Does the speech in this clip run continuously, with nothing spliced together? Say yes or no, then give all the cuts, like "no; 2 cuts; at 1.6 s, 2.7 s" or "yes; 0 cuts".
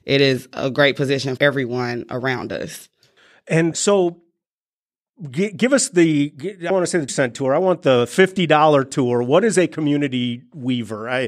no; 4 cuts; at 1.4 s, 3.7 s, 6.7 s, 7.1 s